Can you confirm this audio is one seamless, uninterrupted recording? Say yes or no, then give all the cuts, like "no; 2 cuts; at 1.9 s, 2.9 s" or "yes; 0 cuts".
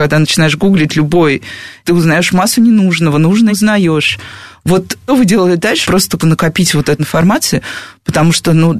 no; 6 cuts; at 1.8 s, 3.5 s, 5.1 s, 5.8 s, 6.2 s, 7.0 s